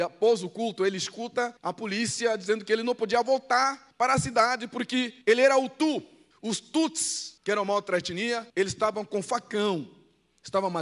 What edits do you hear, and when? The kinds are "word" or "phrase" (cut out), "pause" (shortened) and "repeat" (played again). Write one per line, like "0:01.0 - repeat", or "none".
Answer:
0:01.6 - pause
0:03.9 - pause
0:05.2 - pause
0:06.3 - pause
0:07.4 - pause
0:08.5 - pause